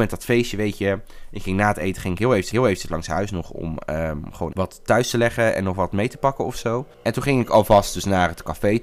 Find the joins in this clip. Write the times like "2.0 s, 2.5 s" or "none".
2.5 s, 4.5 s